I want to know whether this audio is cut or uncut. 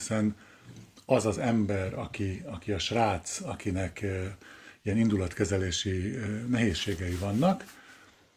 uncut